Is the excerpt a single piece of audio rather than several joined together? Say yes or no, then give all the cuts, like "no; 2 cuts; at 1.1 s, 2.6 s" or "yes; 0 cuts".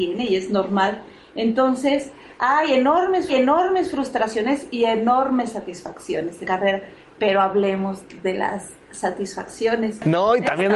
no; 2 cuts; at 3.3 s, 6.4 s